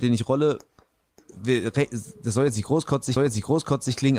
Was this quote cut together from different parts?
yes; 2 cuts; at 1.3 s, 3.2 s

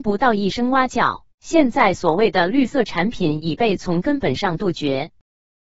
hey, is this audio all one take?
no; 1 cut; at 1.3 s

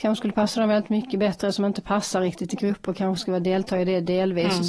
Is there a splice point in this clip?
no; 0 cuts

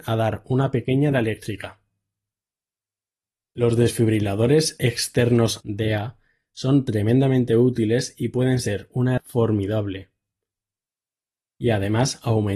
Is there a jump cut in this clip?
yes; 3 cuts; at 1.1 s, 5.6 s, 9.2 s

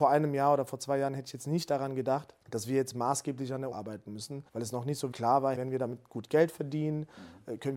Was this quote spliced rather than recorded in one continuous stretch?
yes; 5 cuts; at 2.4 s, 3.7 s, 4.5 s, 5.1 s, 5.5 s

